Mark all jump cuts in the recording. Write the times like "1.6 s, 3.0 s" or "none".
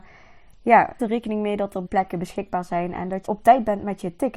1.0 s, 1.9 s, 3.3 s